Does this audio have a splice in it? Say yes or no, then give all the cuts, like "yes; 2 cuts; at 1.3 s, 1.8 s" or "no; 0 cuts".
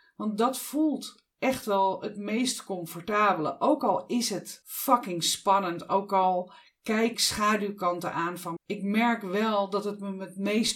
yes; 2 cuts; at 7.1 s, 8.6 s